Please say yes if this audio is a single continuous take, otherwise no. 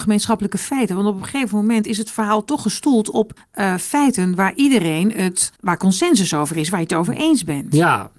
no